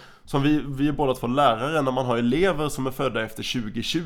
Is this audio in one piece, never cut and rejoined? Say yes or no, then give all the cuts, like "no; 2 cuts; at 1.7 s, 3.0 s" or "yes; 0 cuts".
yes; 0 cuts